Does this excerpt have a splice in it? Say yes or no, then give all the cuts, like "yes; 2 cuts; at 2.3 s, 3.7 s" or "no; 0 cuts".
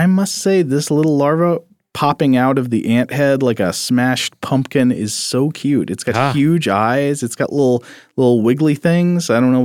no; 0 cuts